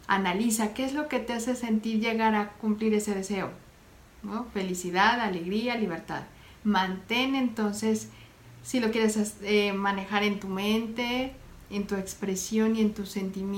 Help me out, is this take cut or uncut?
uncut